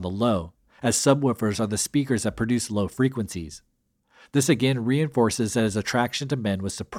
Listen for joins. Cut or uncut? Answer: uncut